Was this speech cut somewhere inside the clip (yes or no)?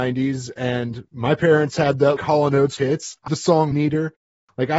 yes